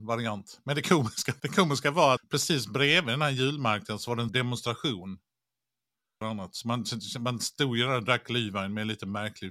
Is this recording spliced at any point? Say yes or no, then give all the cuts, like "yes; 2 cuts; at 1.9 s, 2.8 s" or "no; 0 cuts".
yes; 4 cuts; at 1.4 s, 2.2 s, 4.3 s, 6.2 s